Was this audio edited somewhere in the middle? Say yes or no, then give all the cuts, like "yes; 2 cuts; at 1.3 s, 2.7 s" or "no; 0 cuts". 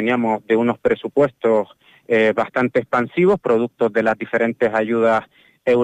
no; 0 cuts